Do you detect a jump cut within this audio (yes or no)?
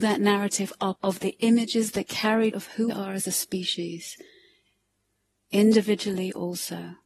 yes